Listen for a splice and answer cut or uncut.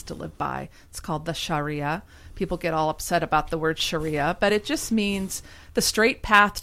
uncut